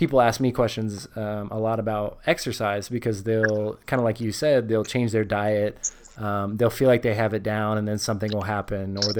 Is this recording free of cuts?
yes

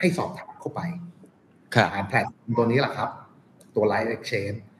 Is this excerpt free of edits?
yes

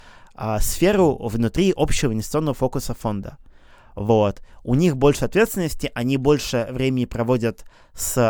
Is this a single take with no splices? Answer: yes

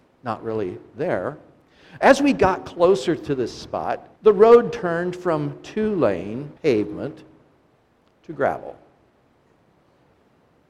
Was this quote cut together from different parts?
yes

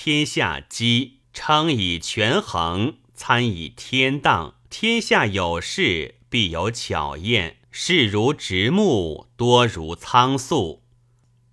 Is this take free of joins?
no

